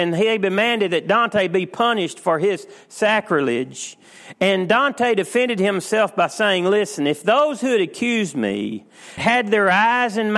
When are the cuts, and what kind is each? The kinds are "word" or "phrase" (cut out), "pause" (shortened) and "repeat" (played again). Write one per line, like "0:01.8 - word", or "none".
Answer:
0:09.2 - word